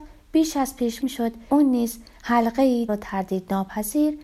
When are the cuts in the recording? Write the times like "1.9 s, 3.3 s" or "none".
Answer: 1.0 s, 1.5 s, 2.9 s